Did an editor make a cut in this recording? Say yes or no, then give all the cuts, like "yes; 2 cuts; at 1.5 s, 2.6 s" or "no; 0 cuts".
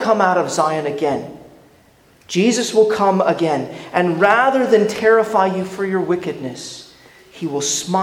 no; 0 cuts